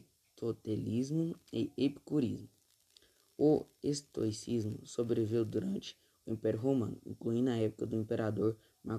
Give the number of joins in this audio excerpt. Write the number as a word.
zero